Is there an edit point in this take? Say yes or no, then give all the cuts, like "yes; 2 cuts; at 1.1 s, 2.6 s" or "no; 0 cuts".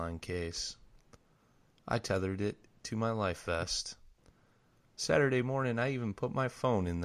no; 0 cuts